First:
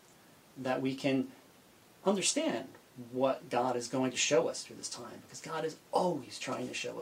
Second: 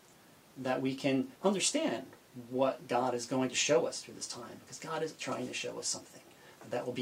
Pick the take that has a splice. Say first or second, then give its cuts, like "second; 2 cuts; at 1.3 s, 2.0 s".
second; 2 cuts; at 1.4 s, 5.2 s